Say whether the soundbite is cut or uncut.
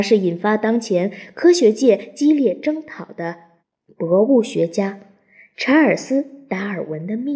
cut